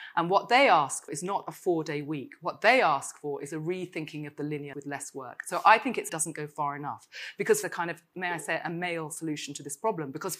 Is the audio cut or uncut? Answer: cut